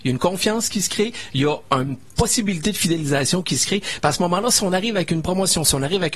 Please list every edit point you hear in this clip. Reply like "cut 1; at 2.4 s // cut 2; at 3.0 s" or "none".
none

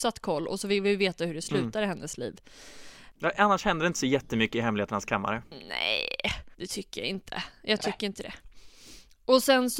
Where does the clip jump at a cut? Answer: cut 1; at 3.1 s // cut 2; at 6.5 s

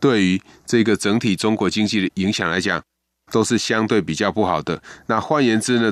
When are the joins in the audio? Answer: none

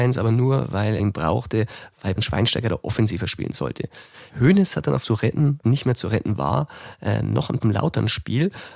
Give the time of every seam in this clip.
cut 1; at 1.0 s // cut 2; at 2.2 s // cut 3; at 4.3 s // cut 4; at 5.0 s // cut 5; at 5.6 s // cut 6; at 7.6 s

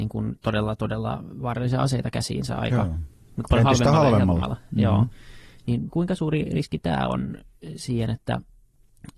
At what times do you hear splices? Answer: none

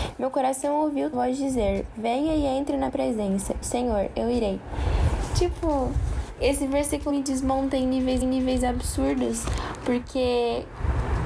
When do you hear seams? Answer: cut 1; at 1.1 s // cut 2; at 2.9 s // cut 3; at 3.6 s // cut 4; at 7.1 s // cut 5; at 8.2 s

